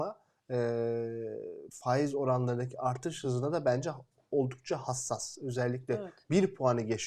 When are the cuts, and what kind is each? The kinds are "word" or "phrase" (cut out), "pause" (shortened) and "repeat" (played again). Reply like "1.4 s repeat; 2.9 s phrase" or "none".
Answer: none